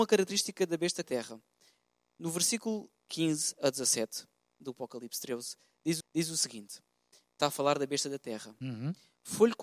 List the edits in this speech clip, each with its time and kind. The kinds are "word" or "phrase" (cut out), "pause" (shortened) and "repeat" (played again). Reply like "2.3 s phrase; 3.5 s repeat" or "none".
1.0 s phrase; 6.0 s repeat; 7.4 s word